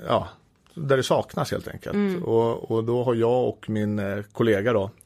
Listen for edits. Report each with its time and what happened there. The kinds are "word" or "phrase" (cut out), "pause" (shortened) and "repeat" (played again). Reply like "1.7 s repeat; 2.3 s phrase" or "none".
none